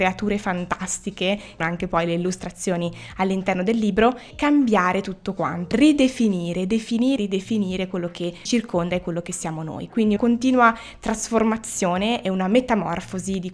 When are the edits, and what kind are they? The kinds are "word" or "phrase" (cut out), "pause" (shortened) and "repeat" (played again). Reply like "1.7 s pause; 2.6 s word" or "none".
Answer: 1.6 s word; 4.3 s word; 5.7 s word; 7.2 s word; 8.5 s word; 10.2 s word